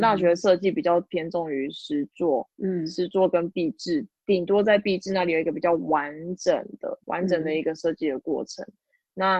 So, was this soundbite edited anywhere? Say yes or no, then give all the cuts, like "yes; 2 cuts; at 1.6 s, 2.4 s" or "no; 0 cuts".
yes; 2 cuts; at 2.5 s, 7.0 s